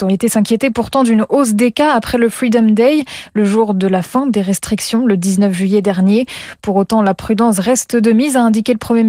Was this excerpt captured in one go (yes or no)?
yes